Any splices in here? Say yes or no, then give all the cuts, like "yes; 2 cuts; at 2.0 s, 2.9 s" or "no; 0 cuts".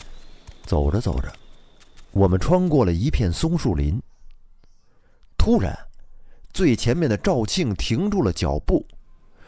no; 0 cuts